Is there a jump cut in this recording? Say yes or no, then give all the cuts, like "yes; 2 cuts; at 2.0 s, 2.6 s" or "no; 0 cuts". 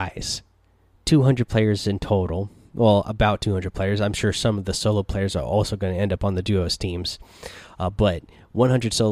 no; 0 cuts